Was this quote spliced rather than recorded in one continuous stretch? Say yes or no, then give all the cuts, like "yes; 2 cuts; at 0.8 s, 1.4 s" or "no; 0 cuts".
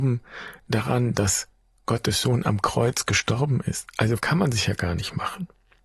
yes; 1 cut; at 4.2 s